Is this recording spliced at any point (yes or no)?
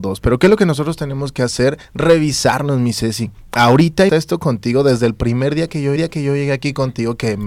yes